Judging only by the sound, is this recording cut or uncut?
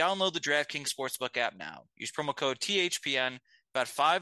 uncut